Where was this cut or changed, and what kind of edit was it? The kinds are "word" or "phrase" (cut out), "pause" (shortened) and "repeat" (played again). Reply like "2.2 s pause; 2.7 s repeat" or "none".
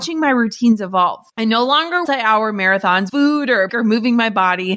1.3 s pause; 2.0 s phrase; 3.1 s word; 3.7 s word